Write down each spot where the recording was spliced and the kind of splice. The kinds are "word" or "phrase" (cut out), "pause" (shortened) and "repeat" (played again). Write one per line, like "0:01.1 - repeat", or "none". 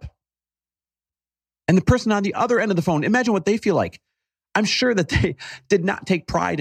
none